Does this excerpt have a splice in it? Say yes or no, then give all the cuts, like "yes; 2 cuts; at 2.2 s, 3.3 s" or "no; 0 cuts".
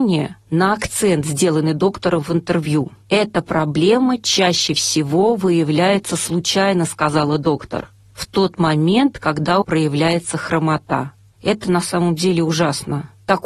yes; 1 cut; at 9.6 s